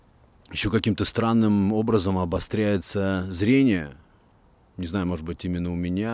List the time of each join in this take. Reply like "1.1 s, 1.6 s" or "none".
none